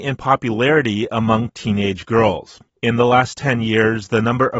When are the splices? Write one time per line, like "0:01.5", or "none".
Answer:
0:02.7